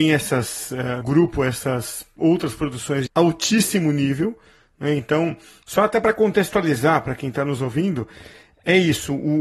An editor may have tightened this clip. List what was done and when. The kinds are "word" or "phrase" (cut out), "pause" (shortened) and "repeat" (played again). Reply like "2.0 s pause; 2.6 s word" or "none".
1.0 s word; 3.1 s phrase